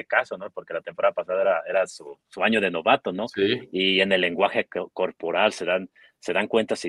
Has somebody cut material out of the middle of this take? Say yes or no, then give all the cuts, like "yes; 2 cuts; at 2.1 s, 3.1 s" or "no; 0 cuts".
no; 0 cuts